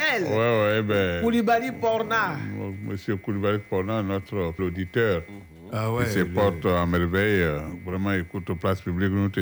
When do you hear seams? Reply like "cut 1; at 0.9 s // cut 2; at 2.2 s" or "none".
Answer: cut 1; at 4.6 s